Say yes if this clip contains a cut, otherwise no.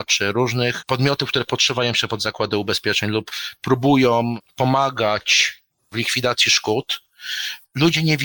no